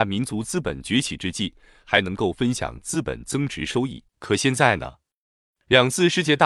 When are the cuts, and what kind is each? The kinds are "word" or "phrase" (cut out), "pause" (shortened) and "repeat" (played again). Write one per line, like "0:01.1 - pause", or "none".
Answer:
0:04.1 - pause